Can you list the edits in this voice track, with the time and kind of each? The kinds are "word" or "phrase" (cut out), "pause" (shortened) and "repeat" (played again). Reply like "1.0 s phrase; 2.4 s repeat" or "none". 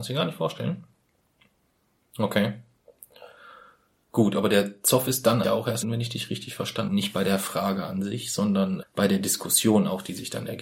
5.4 s word; 5.8 s word; 6.9 s word; 8.8 s word